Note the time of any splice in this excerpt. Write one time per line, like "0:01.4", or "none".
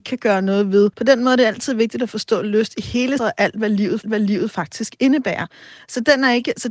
0:00.9
0:03.2
0:04.0